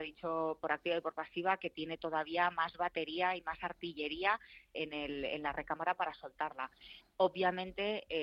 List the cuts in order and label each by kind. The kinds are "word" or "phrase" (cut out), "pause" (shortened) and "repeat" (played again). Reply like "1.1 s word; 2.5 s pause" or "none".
4.7 s word